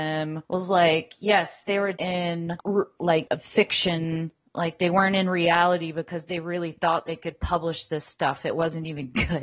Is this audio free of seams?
no; 1 cut; at 1.9 s

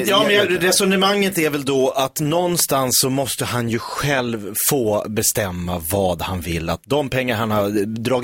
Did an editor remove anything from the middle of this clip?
no; 0 cuts

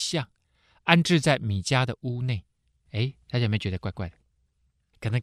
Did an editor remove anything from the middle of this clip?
no; 0 cuts

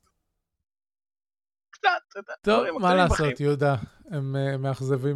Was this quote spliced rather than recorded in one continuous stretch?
no; 0 cuts

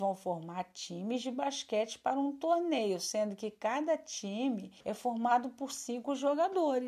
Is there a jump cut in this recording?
yes; 1 cut; at 4.8 s

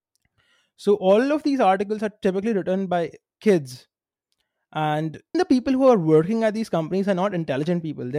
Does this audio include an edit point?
yes; 1 cut; at 5.3 s

